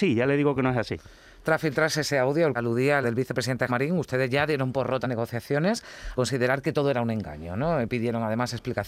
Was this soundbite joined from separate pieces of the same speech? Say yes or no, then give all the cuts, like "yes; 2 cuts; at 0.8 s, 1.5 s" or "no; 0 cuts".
yes; 5 cuts; at 2.5 s, 3.0 s, 3.7 s, 5.0 s, 6.1 s